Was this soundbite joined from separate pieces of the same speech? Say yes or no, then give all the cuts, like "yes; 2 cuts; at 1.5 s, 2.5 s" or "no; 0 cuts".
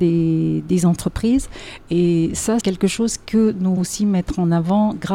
yes; 2 cuts; at 2.6 s, 3.8 s